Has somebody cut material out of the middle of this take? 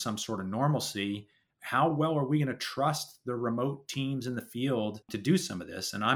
no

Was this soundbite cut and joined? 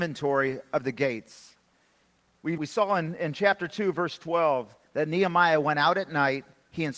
yes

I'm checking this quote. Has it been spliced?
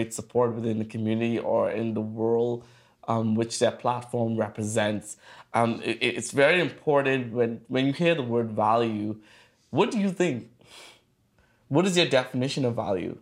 no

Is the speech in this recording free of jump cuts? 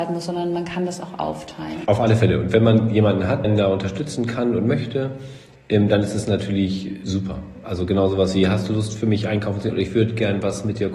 no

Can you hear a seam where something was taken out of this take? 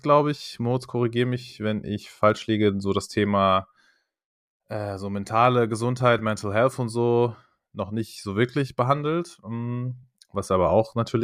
no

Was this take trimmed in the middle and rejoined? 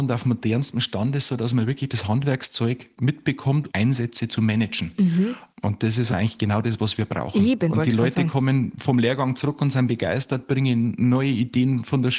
yes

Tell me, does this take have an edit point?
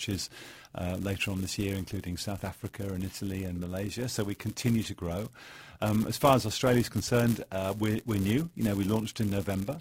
no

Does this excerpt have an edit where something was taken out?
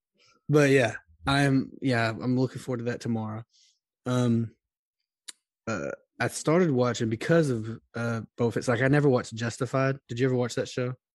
no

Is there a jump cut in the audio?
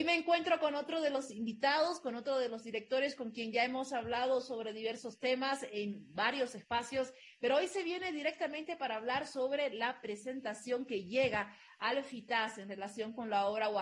no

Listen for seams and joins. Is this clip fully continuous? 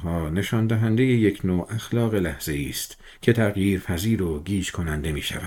yes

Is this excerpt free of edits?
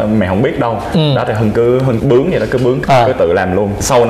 yes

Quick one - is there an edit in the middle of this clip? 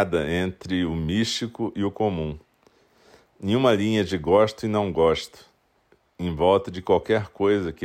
no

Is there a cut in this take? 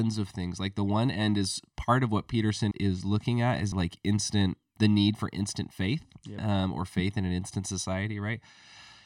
yes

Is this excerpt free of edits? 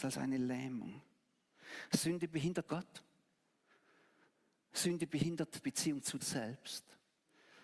no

